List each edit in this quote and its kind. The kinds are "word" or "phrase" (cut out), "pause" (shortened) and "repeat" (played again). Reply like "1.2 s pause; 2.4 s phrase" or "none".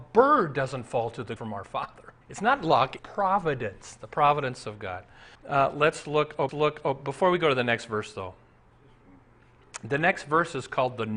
1.4 s phrase; 2.2 s pause; 3.0 s word; 5.3 s pause; 6.5 s repeat